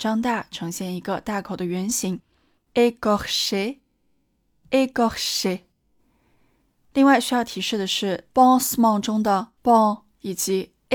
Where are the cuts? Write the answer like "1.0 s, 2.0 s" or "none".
9.6 s